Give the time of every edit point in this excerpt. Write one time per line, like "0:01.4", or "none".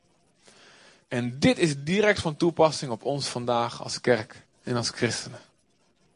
none